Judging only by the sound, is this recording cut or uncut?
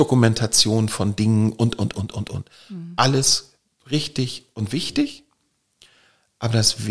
uncut